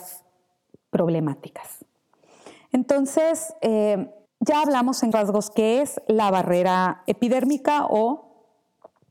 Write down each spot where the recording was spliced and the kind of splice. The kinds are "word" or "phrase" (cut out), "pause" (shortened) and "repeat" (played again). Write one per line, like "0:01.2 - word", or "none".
0:04.3 - pause
0:05.1 - word